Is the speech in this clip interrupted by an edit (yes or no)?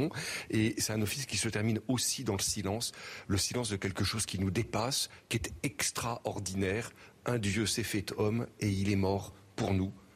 no